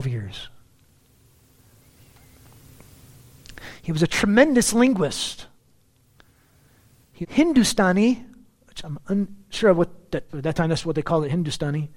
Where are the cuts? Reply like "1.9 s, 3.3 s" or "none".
7.2 s, 10.3 s